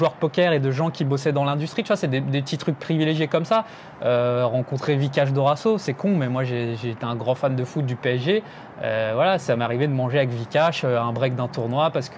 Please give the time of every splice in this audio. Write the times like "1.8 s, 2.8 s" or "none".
none